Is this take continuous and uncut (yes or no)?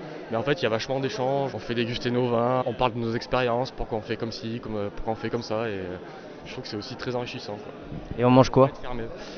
no